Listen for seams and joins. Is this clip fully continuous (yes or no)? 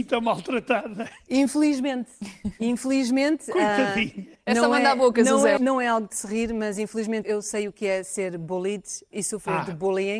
no